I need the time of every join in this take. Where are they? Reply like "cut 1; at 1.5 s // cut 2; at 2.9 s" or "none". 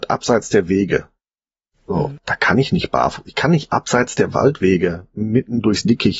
none

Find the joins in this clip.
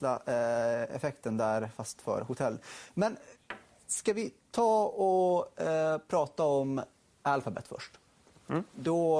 none

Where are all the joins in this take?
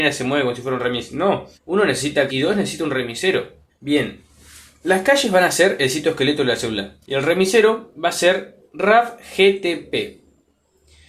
cut 1; at 1.5 s // cut 2; at 2.3 s // cut 3; at 3.7 s // cut 4; at 7.0 s

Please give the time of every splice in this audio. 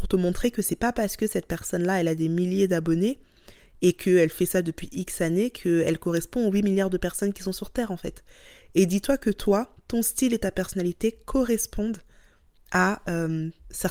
none

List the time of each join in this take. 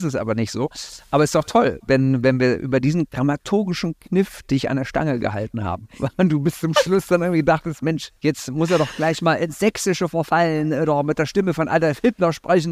cut 1; at 3.1 s // cut 2; at 8.2 s

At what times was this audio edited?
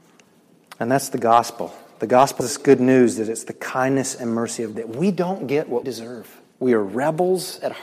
cut 1; at 2.4 s // cut 2; at 4.7 s // cut 3; at 5.8 s // cut 4; at 6.5 s

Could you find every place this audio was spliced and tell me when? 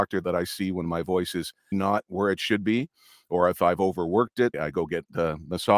cut 1; at 1.7 s // cut 2; at 4.5 s

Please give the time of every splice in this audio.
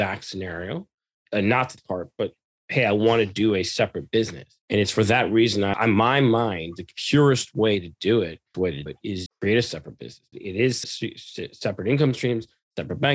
cut 1; at 1.8 s // cut 2; at 4.6 s // cut 3; at 5.7 s // cut 4; at 8.5 s // cut 5; at 8.9 s // cut 6; at 9.3 s // cut 7; at 10.3 s // cut 8; at 10.8 s

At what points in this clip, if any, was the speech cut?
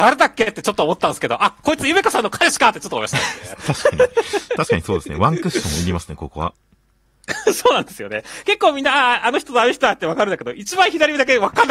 none

